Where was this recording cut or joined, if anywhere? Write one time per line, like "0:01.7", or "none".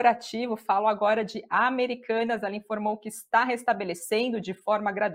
none